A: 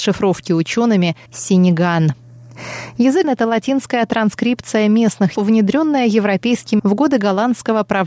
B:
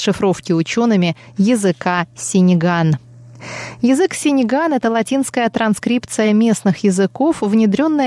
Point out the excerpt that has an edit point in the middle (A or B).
A